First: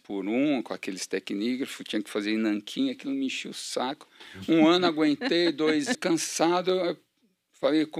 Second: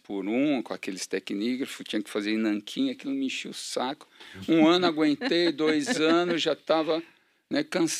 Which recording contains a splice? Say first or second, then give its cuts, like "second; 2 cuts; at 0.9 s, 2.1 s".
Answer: first; 1 cut; at 5.9 s